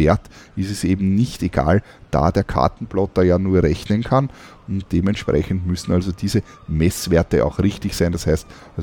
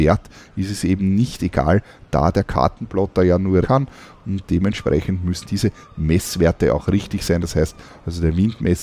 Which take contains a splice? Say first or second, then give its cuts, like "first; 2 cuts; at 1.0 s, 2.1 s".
second; 2 cuts; at 3.6 s, 5.4 s